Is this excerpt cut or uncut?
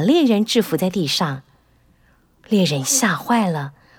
uncut